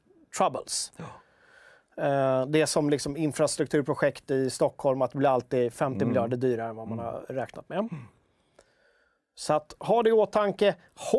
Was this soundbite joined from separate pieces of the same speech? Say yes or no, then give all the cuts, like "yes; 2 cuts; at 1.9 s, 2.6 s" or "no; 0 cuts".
no; 0 cuts